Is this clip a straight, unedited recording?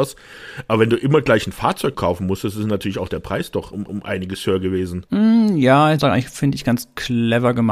no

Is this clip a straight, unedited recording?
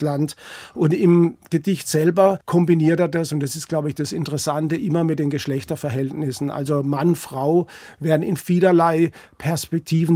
no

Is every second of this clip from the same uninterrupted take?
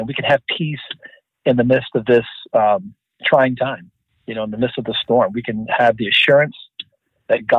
no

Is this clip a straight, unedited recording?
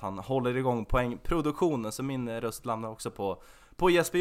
yes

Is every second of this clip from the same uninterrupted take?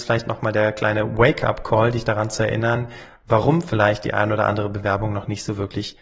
yes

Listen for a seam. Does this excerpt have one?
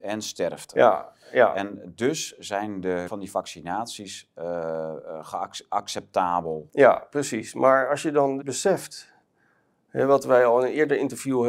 yes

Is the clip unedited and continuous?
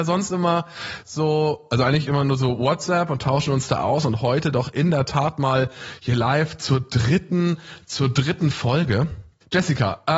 yes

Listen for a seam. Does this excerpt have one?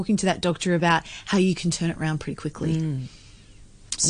no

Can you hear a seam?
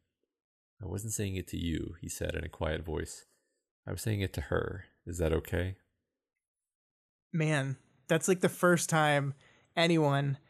no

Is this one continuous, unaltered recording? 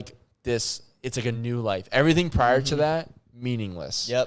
yes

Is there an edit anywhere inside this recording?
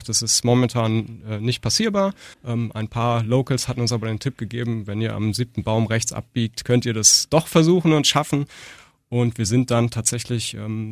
yes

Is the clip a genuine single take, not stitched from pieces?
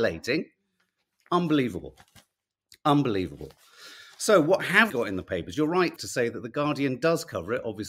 no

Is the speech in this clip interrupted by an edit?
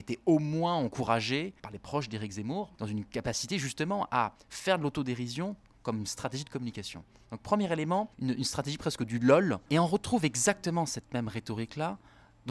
no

